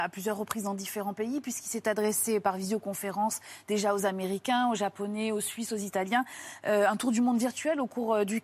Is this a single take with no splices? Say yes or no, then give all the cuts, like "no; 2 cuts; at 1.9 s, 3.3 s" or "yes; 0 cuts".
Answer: yes; 0 cuts